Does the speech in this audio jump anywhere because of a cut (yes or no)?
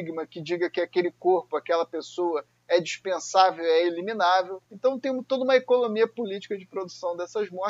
yes